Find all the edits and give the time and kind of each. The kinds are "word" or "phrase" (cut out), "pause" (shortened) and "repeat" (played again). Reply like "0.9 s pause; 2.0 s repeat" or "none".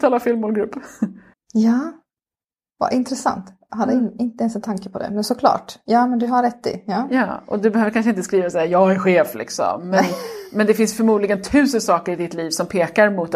1.3 s pause